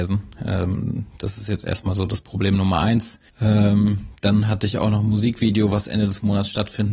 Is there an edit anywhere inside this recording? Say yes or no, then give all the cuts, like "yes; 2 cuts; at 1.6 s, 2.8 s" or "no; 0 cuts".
yes; 1 cut; at 3.3 s